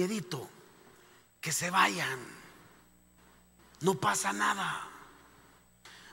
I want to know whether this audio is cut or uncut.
uncut